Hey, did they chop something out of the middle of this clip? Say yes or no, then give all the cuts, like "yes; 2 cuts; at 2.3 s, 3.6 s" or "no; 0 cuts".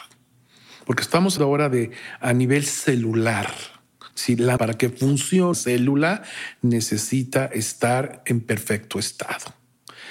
yes; 4 cuts; at 1.4 s, 4.1 s, 4.6 s, 5.5 s